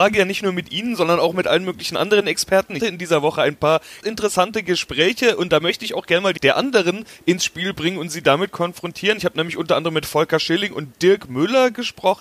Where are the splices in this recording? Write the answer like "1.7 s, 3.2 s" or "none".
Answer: 2.8 s, 4.0 s, 6.4 s